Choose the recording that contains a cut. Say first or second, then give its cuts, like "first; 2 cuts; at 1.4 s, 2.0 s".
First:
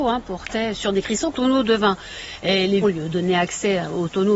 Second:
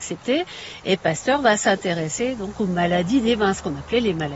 first; 2 cuts; at 1.3 s, 2.8 s